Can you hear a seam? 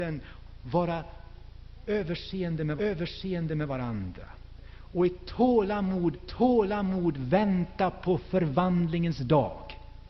yes; 2 cuts; at 2.8 s, 6.1 s

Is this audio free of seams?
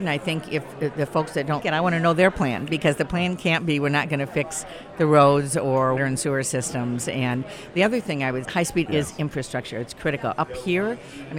no; 4 cuts; at 1.6 s, 6.0 s, 8.4 s, 8.9 s

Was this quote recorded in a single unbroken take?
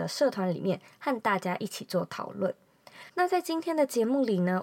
no; 1 cut; at 3.1 s

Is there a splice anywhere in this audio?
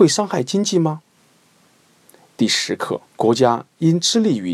yes; 1 cut; at 3.1 s

